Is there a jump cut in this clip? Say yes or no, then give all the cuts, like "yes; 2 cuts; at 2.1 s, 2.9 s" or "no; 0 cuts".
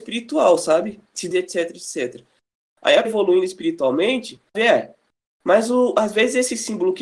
yes; 3 cuts; at 1.3 s, 3.0 s, 4.5 s